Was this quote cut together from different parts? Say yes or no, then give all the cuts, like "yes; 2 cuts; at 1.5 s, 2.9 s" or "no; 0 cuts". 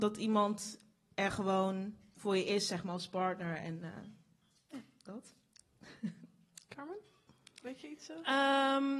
no; 0 cuts